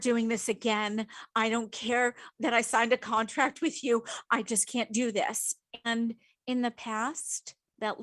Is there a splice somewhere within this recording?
no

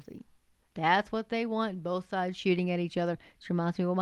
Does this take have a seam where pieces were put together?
no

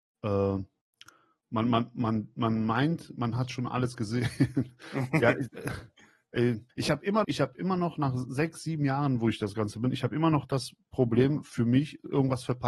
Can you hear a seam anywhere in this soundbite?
yes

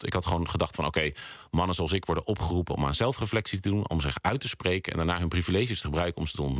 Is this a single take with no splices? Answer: yes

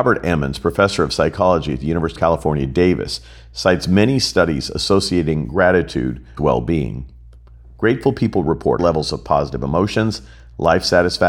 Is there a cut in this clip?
yes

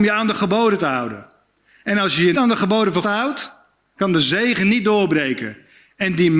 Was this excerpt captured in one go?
no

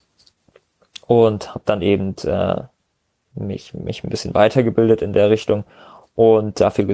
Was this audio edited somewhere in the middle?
no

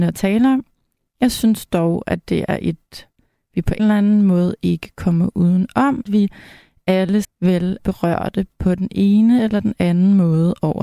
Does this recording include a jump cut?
yes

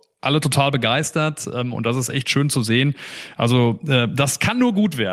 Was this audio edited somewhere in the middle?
no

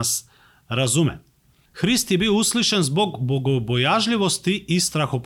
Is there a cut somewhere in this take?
no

